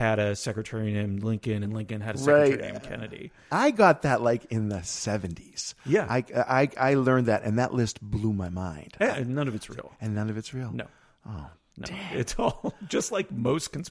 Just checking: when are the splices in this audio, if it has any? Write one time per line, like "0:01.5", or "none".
none